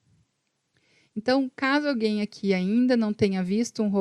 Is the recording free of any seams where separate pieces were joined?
yes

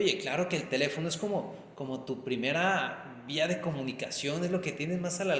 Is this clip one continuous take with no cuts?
yes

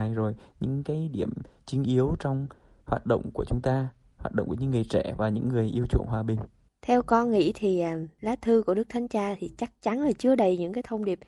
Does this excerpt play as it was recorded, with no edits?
yes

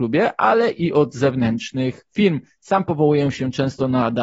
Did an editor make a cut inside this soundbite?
no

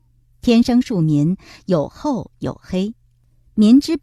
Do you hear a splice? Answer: no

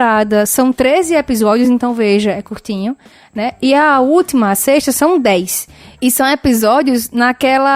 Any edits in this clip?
no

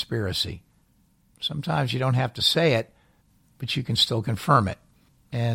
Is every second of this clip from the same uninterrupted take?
yes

